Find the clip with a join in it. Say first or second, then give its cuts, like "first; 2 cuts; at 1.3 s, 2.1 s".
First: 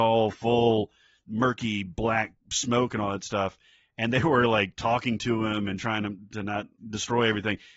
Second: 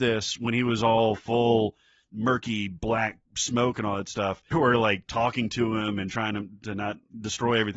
second; 1 cut; at 4.5 s